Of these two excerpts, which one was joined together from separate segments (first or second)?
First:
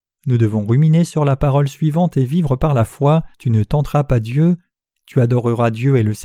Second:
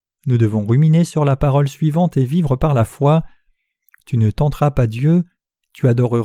first